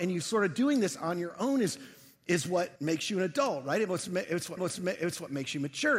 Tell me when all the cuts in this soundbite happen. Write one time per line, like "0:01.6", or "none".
0:02.8
0:04.6